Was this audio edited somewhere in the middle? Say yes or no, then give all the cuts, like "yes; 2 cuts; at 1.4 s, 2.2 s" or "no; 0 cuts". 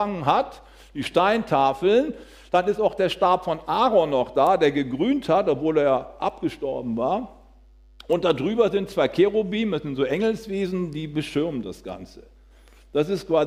no; 0 cuts